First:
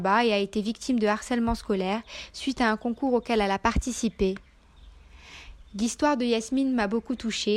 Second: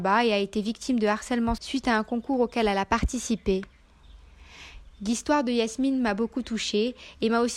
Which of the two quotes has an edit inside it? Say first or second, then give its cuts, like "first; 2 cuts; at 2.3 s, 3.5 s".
second; 1 cut; at 1.6 s